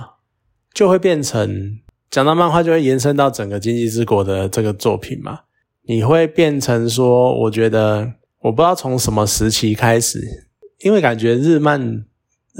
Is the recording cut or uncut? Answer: uncut